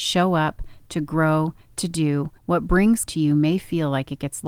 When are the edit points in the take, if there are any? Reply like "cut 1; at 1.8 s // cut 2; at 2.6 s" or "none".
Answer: cut 1; at 2.4 s // cut 2; at 3.1 s